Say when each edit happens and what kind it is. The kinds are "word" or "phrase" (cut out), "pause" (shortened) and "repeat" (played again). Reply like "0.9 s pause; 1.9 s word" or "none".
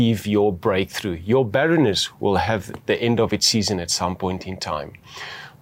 none